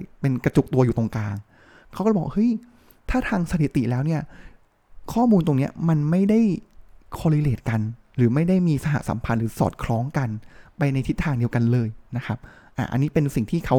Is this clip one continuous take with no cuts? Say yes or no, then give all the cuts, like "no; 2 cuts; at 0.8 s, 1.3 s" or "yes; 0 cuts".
yes; 0 cuts